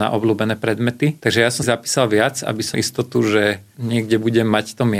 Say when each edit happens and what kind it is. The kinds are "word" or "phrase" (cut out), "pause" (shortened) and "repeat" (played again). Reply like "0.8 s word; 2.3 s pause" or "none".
1.6 s word; 2.7 s word